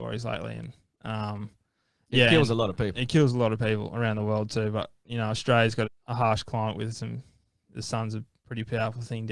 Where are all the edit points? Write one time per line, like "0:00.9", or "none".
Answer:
0:05.8